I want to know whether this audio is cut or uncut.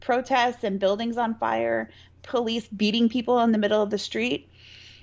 uncut